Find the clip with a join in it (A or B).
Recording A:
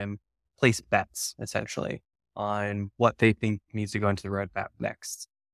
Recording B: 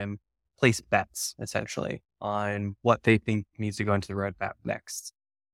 B